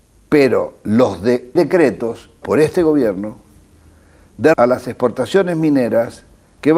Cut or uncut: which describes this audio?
cut